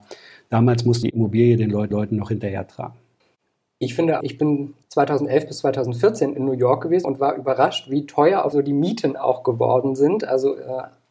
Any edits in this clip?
yes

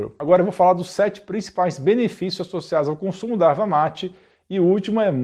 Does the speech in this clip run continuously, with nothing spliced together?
yes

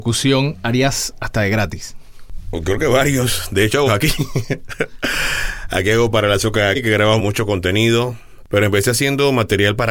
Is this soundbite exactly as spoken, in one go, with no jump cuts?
no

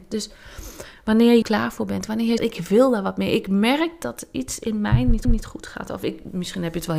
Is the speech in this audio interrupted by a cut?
yes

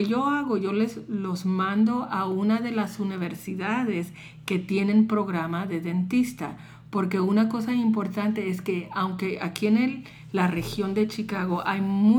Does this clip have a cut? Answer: no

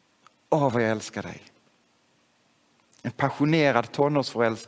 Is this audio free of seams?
yes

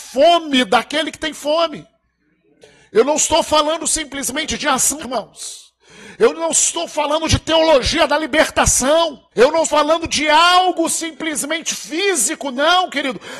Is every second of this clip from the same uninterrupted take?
no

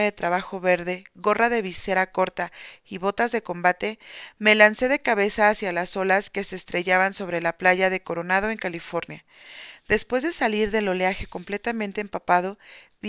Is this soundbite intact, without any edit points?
yes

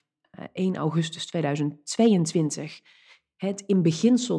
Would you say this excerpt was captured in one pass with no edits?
yes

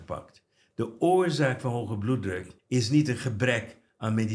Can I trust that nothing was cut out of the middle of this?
no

